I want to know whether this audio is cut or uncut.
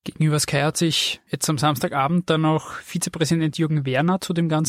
uncut